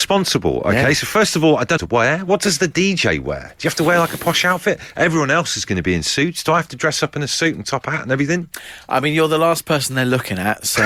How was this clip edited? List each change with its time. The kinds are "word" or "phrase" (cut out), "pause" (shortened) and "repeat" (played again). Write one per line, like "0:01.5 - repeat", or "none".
0:01.8 - phrase

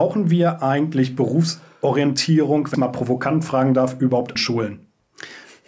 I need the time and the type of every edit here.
0:02.7 - word
0:04.3 - word

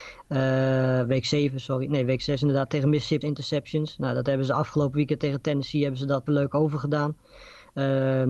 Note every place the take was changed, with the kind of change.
0:03.2 - phrase
0:06.3 - word

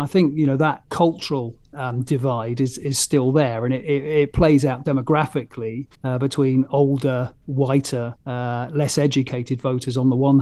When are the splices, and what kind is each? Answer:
0:05.9 - pause
0:08.2 - pause

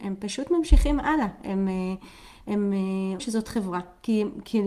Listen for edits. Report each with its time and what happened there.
0:03.2 - word

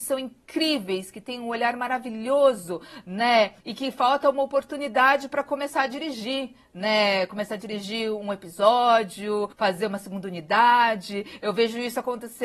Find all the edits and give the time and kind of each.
0:03.6 - pause
0:09.5 - pause

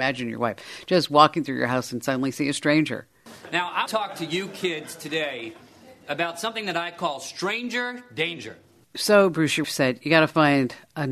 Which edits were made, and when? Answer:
0:03.9 - word
0:09.6 - word

